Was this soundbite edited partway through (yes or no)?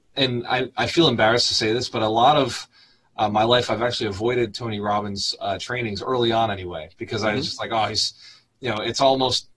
no